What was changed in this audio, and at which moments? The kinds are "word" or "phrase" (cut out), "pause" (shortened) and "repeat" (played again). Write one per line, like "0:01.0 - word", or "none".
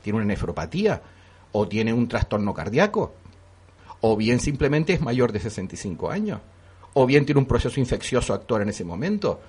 none